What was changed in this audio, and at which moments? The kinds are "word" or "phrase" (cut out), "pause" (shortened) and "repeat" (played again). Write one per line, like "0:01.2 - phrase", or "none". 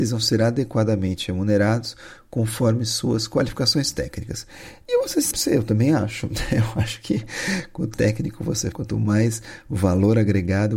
0:05.3 - word
0:07.9 - word
0:08.7 - word